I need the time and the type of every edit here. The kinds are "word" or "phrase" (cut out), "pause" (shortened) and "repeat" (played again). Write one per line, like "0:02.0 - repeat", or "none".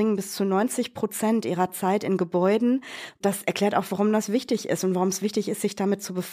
none